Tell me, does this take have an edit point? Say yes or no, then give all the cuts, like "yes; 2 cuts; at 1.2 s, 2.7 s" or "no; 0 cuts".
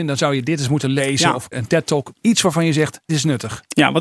yes; 3 cuts; at 1.5 s, 2.2 s, 3.1 s